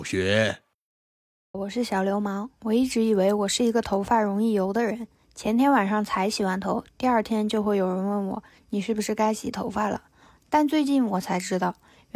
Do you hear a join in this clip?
yes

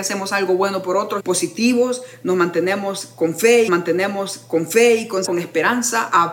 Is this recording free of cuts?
no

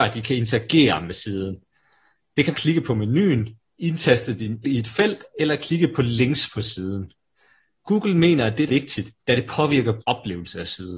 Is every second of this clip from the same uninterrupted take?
no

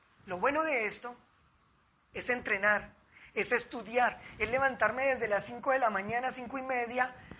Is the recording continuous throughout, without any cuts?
yes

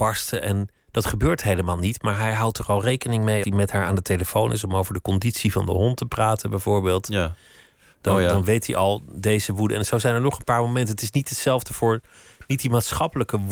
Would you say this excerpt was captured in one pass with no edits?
no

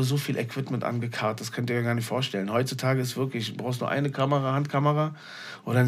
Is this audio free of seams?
yes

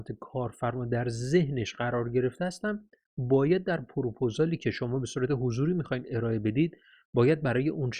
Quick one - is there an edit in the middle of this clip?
no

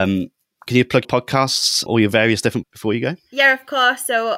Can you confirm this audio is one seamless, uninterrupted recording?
no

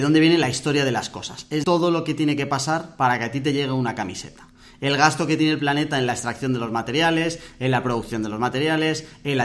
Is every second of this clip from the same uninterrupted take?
no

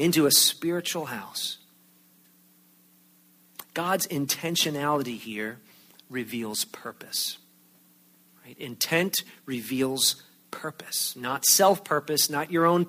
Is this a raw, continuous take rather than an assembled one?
yes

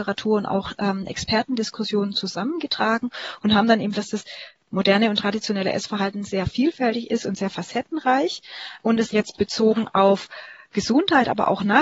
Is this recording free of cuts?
no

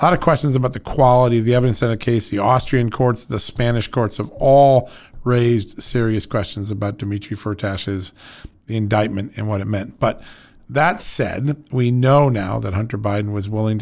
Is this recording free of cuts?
yes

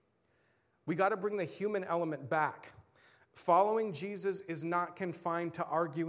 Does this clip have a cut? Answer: no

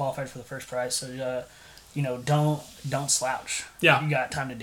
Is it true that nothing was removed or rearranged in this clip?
yes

